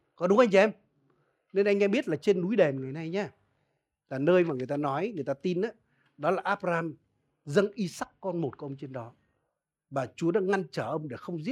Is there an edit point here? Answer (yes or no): no